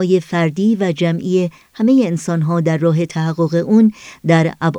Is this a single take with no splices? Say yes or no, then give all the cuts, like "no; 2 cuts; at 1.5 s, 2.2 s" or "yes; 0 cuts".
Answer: yes; 0 cuts